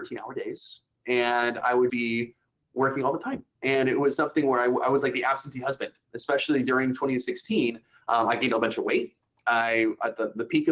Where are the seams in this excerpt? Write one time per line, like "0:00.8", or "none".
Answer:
0:01.9